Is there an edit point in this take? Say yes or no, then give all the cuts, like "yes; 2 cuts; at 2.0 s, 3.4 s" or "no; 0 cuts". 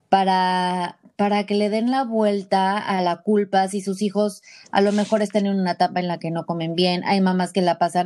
no; 0 cuts